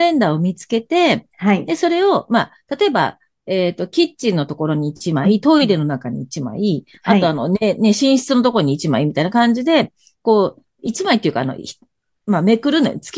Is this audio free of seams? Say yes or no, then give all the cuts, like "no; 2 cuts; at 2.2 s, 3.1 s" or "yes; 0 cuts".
yes; 0 cuts